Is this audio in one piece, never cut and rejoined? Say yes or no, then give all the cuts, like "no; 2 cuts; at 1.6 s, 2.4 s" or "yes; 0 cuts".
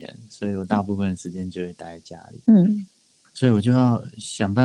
no; 1 cut; at 2.4 s